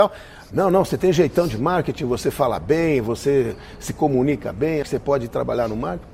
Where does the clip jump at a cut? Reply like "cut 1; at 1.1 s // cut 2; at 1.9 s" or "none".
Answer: cut 1; at 4.8 s